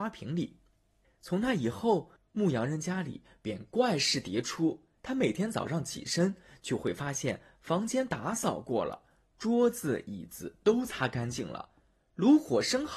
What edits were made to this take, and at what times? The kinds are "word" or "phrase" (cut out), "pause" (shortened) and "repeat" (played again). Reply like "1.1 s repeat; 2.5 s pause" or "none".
5.0 s pause

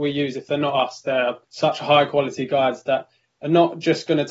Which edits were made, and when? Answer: 1.4 s pause

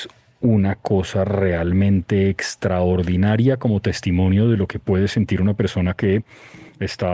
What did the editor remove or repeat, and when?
none

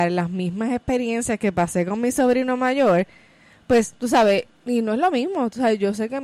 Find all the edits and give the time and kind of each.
none

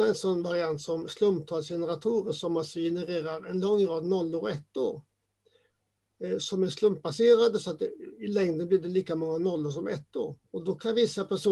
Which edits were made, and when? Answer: 10.4 s pause

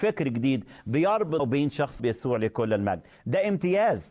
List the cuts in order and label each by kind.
1.4 s word; 2.0 s word

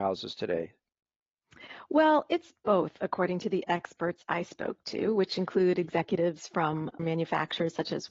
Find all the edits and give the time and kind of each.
7.0 s word

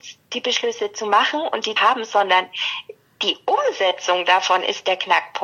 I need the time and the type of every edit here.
1.8 s word

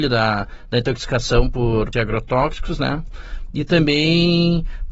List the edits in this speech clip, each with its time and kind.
1.9 s word

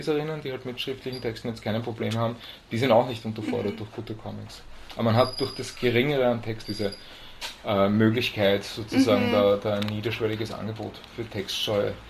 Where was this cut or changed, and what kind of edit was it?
6.6 s word

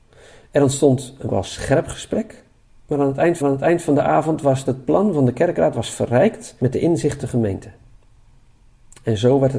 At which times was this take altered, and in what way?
1.3 s phrase; 2.7 s pause; 3.4 s repeat; 4.7 s phrase; 7.2 s word

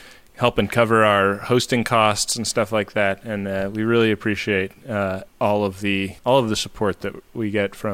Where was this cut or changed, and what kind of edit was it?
5.3 s pause; 6.2 s pause

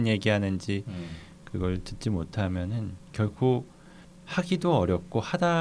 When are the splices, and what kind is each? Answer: 3.0 s pause

